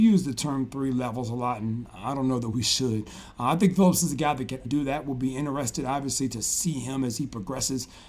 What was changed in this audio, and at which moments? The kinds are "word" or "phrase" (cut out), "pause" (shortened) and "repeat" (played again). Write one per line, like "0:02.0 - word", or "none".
0:04.6 - word